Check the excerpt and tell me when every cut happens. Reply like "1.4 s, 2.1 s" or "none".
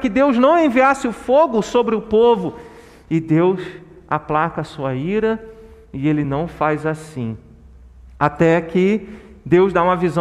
none